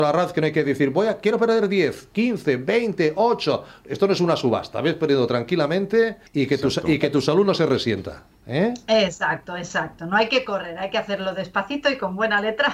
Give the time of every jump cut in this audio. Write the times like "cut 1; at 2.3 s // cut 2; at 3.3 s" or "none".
cut 1; at 6.3 s